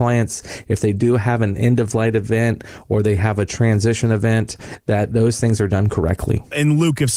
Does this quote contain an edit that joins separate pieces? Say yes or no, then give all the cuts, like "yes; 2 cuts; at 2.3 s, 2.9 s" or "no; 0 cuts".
no; 0 cuts